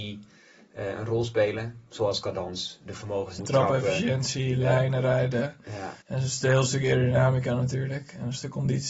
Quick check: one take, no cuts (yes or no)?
no